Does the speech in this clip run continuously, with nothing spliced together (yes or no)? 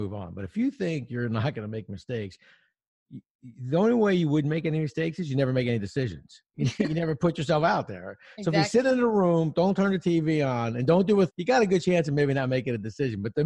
no